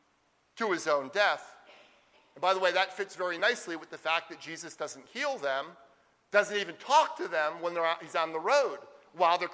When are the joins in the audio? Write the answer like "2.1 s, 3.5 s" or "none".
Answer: none